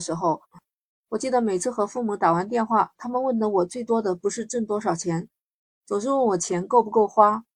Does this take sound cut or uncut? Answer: uncut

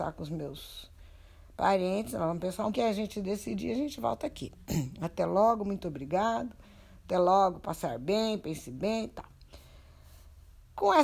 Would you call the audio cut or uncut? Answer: cut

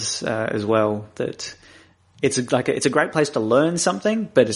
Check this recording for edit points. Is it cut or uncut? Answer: uncut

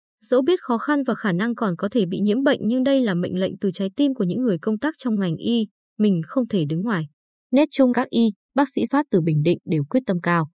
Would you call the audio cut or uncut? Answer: cut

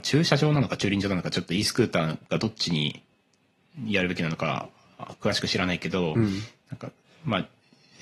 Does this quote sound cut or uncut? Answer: uncut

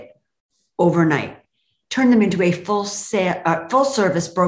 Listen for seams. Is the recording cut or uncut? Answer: uncut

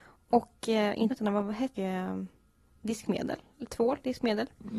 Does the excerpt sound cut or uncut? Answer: cut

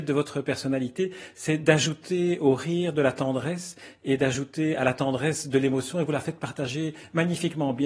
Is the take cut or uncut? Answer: uncut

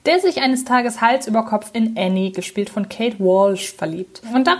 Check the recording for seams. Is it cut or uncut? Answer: uncut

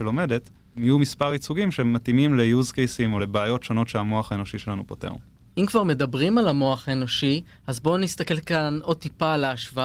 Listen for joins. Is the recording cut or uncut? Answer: uncut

